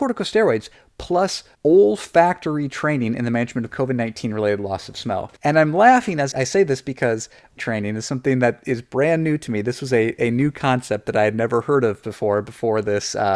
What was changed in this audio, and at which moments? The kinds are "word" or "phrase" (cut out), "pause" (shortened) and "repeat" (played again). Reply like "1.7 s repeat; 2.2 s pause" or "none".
1.5 s pause; 5.4 s pause; 6.3 s word; 7.6 s word